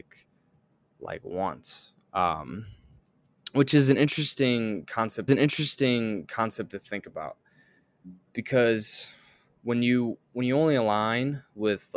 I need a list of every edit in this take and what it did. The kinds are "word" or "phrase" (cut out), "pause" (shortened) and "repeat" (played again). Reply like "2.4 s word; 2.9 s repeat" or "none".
5.3 s repeat